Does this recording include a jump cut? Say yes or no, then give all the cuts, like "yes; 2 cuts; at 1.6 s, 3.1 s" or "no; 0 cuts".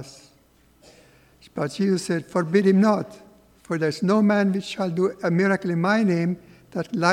no; 0 cuts